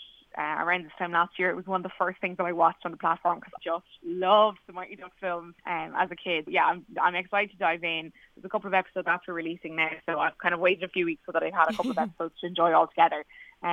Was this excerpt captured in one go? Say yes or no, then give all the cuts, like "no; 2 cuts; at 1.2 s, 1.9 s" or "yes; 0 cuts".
no; 3 cuts; at 3.6 s, 5.6 s, 6.5 s